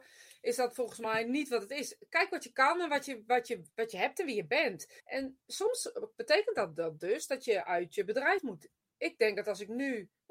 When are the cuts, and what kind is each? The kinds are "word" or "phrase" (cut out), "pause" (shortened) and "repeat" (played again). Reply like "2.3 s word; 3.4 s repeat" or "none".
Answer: 5.0 s pause